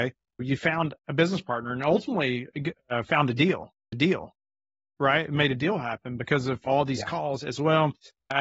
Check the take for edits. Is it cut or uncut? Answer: cut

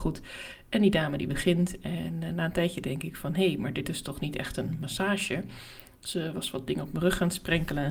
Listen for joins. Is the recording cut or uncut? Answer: uncut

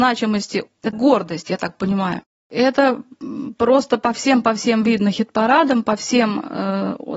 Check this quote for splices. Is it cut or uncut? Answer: cut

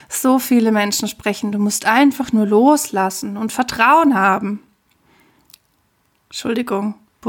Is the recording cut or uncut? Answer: cut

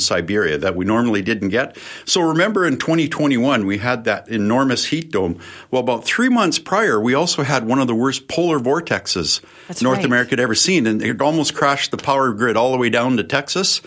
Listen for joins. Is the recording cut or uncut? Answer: uncut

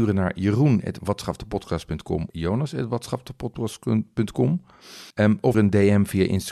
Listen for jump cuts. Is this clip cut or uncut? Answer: cut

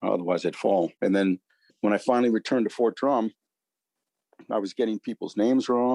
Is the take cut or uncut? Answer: cut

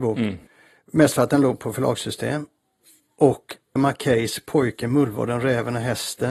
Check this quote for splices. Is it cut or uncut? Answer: cut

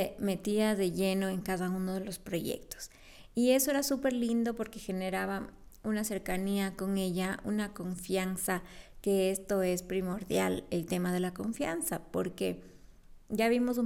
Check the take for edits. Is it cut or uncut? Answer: uncut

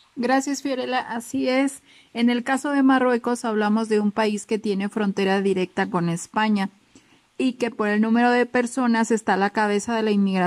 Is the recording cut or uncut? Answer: uncut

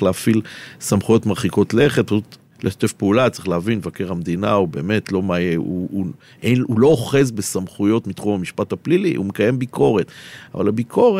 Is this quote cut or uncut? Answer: cut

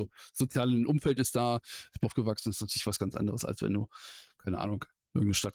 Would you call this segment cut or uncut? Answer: cut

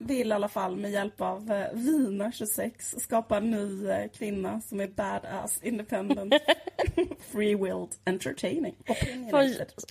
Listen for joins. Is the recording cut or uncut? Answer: cut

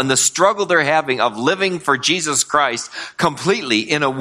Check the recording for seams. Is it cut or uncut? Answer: uncut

